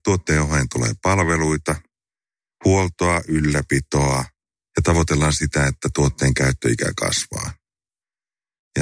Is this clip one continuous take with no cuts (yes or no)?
yes